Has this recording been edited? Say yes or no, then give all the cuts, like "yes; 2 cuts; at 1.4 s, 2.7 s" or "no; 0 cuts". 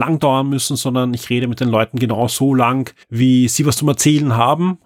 yes; 1 cut; at 3.0 s